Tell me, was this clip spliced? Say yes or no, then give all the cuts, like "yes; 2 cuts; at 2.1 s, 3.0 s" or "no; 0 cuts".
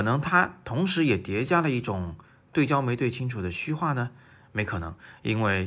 no; 0 cuts